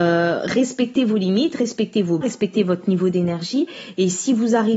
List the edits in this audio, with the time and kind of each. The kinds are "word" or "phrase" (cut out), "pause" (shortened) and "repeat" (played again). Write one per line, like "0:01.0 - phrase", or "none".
0:02.2 - word

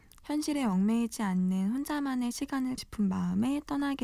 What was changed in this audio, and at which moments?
0:02.8 - word

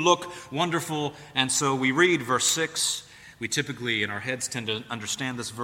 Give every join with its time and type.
none

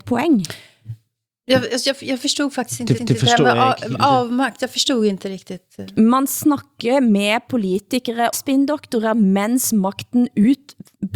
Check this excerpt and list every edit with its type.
0:03.0 - repeat
0:08.3 - word

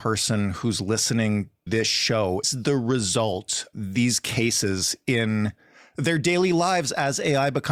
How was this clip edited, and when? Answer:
0:01.7 - word
0:02.4 - word
0:03.7 - word

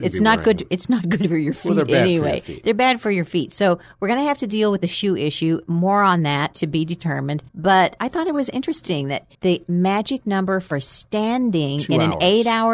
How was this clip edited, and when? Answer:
0:07.5 - pause
0:09.3 - pause

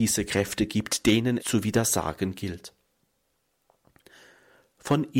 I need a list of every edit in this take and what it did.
0:01.4 - word

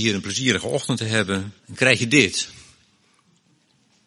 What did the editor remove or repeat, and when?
0:01.6 - pause

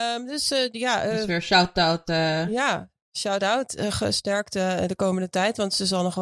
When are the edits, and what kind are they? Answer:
none

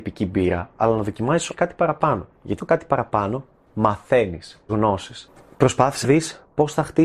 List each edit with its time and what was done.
0:01.5 - word
0:02.6 - word
0:04.7 - word
0:06.0 - word

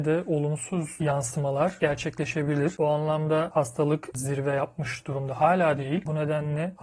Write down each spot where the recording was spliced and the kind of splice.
0:03.5 - phrase
0:04.1 - word

